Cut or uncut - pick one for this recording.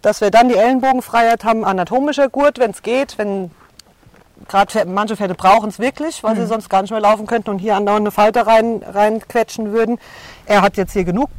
uncut